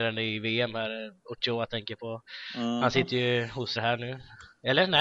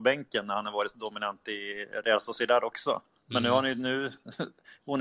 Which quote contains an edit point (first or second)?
first